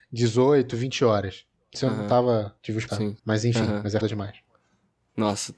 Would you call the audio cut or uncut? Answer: cut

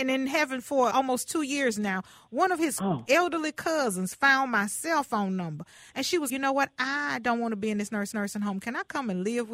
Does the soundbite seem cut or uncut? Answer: cut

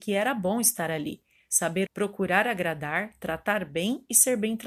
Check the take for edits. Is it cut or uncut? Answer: cut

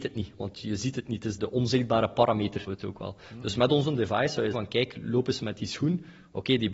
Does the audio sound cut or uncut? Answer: cut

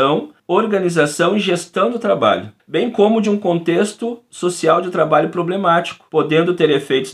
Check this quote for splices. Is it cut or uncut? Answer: uncut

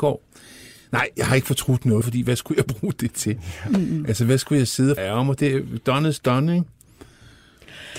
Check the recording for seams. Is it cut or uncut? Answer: cut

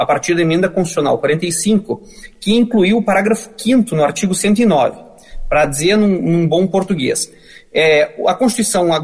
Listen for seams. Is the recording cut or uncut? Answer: uncut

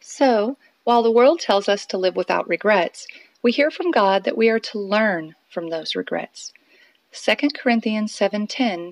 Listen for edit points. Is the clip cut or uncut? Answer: uncut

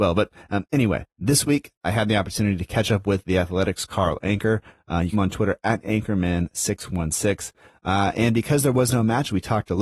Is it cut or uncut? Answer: cut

